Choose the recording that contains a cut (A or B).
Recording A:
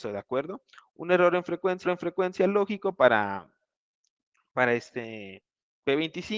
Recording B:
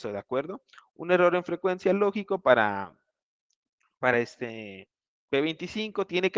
A